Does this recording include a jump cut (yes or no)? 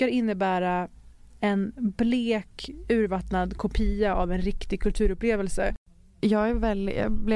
no